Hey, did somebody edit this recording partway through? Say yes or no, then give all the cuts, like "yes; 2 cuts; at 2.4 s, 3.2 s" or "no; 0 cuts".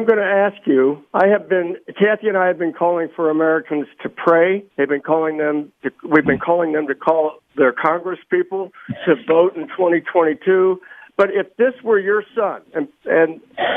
yes; 2 cuts; at 1.1 s, 4.7 s